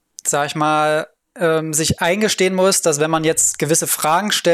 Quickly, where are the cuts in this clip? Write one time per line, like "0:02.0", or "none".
0:01.2